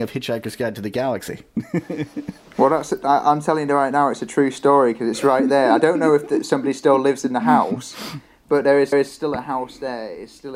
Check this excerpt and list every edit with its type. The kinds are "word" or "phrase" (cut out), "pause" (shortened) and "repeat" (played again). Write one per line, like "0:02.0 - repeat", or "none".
0:08.9 - repeat